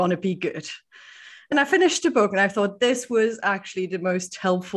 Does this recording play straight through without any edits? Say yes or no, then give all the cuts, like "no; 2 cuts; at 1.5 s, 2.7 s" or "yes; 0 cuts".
no; 1 cut; at 1.5 s